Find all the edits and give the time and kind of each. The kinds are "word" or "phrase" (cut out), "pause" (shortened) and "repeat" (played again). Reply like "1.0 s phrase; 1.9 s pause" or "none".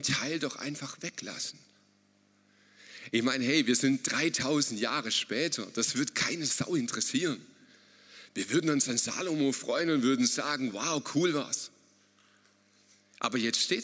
none